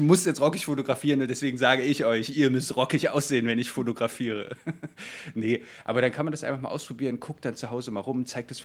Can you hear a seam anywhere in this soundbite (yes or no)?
no